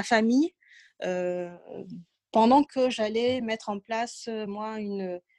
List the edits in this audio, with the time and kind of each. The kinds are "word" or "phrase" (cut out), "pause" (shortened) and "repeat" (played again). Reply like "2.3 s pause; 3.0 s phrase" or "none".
none